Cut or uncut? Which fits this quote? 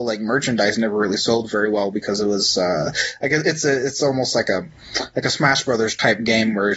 uncut